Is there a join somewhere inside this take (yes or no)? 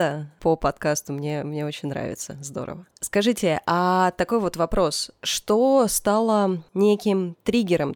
no